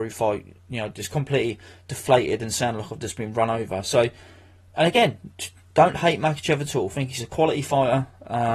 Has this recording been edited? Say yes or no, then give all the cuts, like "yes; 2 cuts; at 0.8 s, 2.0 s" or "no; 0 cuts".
no; 0 cuts